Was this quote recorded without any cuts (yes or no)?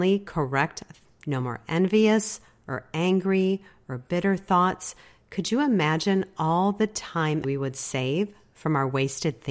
no